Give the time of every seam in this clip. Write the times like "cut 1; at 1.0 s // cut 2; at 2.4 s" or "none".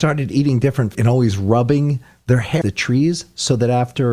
cut 1; at 0.9 s // cut 2; at 2.6 s